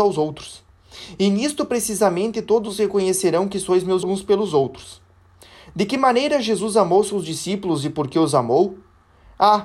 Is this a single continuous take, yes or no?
no